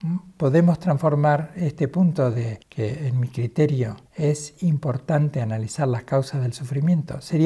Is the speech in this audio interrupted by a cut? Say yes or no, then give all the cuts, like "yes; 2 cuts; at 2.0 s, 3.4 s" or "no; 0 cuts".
yes; 2 cuts; at 2.6 s, 4.1 s